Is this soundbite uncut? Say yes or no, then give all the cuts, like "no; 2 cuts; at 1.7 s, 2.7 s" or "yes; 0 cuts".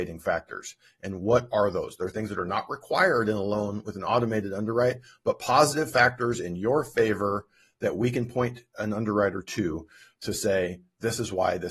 yes; 0 cuts